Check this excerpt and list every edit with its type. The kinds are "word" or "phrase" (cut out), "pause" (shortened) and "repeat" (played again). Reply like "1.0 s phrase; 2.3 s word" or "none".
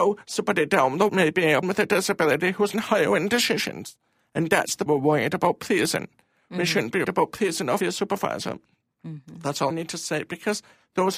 1.1 s word; 1.6 s word; 2.7 s word; 4.9 s word; 7.0 s word; 7.8 s word; 9.7 s word